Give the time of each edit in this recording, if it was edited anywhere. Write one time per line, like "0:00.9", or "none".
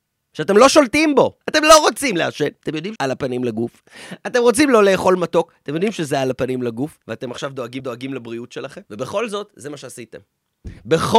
0:01.4
0:02.6
0:03.0
0:07.0
0:07.8
0:08.9